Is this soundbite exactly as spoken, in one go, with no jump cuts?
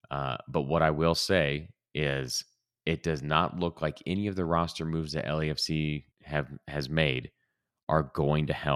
no; 1 cut; at 6.1 s

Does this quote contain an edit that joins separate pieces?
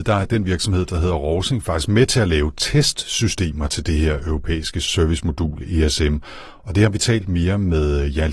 no; 0 cuts

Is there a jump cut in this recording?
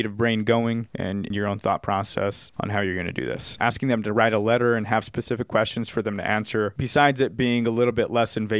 no; 0 cuts

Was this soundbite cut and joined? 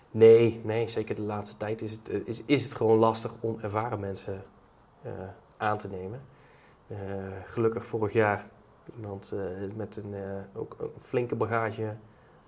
no; 0 cuts

